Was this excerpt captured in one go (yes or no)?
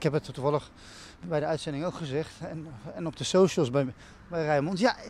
yes